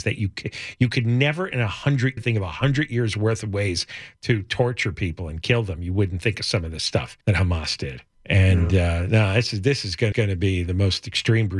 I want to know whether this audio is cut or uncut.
cut